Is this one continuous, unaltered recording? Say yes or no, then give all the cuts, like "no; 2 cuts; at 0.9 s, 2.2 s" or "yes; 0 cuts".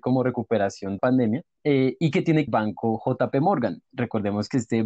no; 4 cuts; at 1.0 s, 1.5 s, 2.5 s, 3.8 s